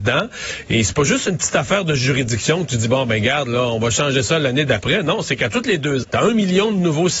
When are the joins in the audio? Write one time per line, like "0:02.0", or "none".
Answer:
0:06.0

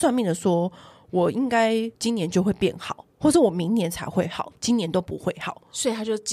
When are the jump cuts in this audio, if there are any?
0:01.9

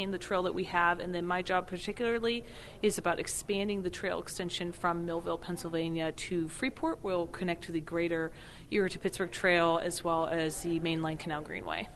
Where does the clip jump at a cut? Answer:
none

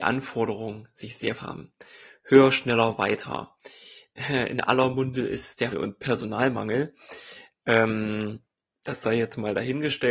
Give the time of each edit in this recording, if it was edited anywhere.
0:01.4
0:05.7

